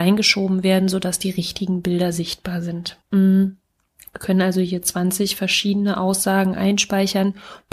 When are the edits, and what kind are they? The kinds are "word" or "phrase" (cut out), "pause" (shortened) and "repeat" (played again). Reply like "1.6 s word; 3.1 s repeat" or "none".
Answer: 3.0 s pause